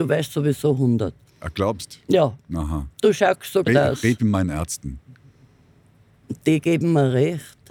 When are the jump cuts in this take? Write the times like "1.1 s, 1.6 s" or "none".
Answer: 1.3 s, 3.7 s